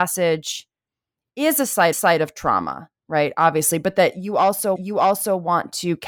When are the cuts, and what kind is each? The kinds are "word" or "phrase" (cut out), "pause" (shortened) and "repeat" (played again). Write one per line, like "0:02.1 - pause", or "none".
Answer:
0:01.9 - repeat
0:04.8 - repeat